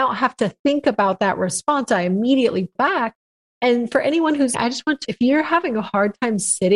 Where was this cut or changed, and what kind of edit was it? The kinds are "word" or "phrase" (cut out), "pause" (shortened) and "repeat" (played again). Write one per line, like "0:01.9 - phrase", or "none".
0:02.8 - word
0:04.5 - word
0:05.0 - word